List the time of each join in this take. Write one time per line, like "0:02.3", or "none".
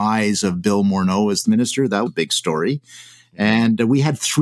0:01.4
0:02.1